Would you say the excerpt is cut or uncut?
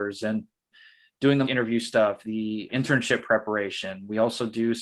cut